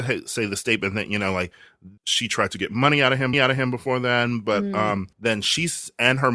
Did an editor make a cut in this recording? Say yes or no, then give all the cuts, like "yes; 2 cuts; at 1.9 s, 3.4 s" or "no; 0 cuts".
yes; 3 cuts; at 2.0 s, 3.3 s, 5.1 s